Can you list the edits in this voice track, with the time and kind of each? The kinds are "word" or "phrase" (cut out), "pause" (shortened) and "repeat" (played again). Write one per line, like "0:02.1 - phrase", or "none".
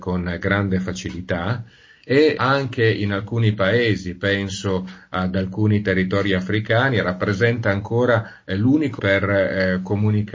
0:02.4 - word
0:09.0 - word